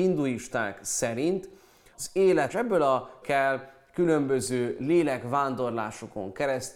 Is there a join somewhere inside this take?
yes; 3 cuts; at 1.9 s, 2.5 s, 3.2 s

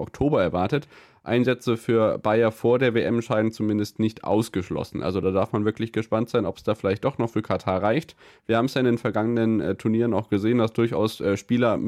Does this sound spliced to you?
no; 0 cuts

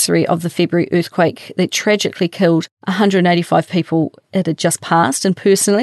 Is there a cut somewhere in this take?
yes; 1 cut; at 4.2 s

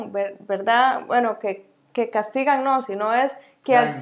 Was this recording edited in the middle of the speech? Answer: no; 0 cuts

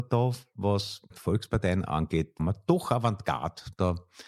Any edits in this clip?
yes; 2 cuts; at 1.1 s, 2.4 s

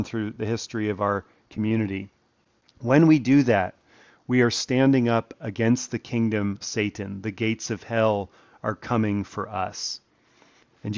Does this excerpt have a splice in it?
yes; 1 cut; at 6.6 s

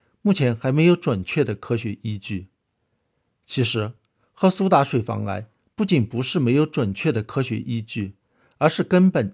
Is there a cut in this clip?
no; 0 cuts

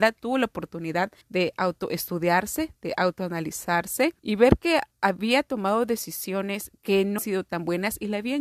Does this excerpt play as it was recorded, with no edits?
no; 4 cuts; at 1.2 s, 4.2 s, 6.8 s, 7.2 s

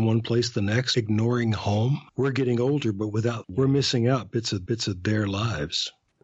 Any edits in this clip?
yes; 4 cuts; at 0.9 s, 2.1 s, 3.4 s, 4.7 s

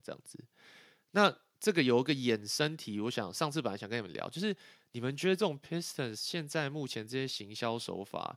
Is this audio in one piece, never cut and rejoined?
yes; 0 cuts

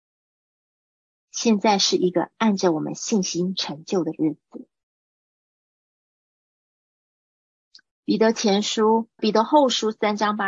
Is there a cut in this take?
yes; 1 cut; at 9.2 s

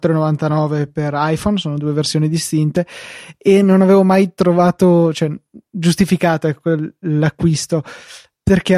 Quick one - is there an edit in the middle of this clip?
no; 0 cuts

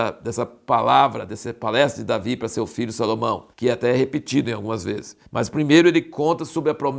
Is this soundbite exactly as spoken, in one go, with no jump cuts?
no; 2 cuts; at 3.5 s, 5.3 s

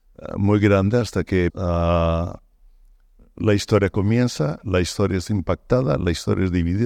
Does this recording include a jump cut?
yes; 1 cut; at 1.5 s

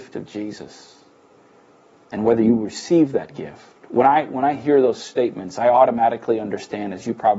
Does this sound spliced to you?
no; 0 cuts

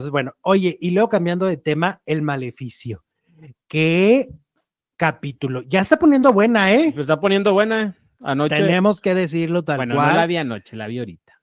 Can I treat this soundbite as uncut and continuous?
yes; 0 cuts

